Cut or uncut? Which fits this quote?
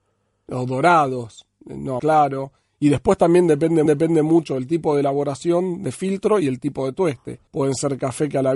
cut